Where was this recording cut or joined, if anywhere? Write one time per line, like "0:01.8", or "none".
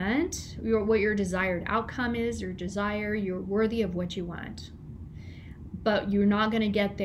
none